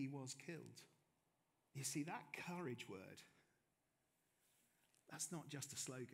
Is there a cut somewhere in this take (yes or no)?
yes